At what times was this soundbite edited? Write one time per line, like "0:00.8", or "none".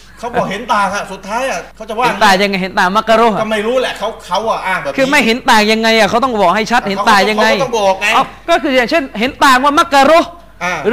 0:01.7